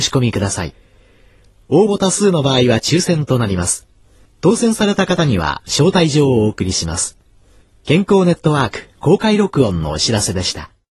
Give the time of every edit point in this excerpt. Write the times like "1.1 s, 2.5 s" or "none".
none